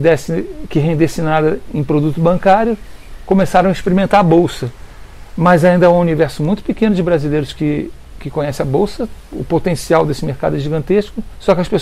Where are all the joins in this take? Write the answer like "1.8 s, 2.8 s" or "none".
none